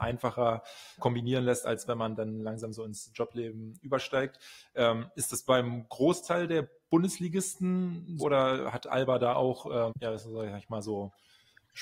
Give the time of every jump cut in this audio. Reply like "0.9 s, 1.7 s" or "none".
1.0 s, 8.2 s, 9.9 s